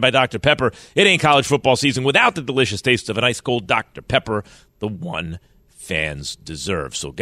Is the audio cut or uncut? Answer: uncut